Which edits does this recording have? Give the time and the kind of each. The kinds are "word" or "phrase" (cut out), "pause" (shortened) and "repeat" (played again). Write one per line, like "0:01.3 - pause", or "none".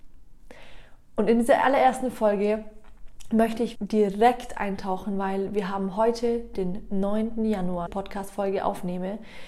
0:03.8 - word
0:07.9 - phrase